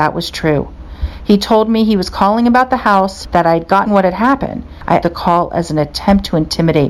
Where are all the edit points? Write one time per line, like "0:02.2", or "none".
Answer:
0:03.9
0:05.0